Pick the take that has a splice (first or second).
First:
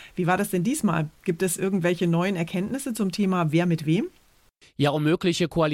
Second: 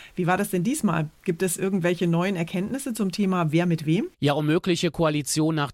second